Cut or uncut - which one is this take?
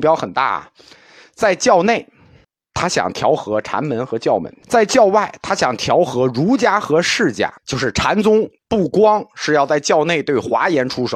cut